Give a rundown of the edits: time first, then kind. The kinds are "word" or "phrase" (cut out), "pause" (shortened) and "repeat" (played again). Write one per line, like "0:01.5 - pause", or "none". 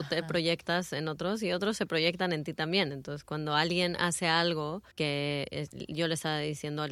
0:04.9 - pause